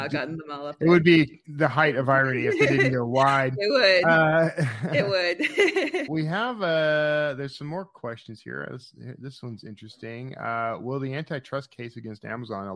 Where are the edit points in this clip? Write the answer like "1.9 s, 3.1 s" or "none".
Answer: 6.1 s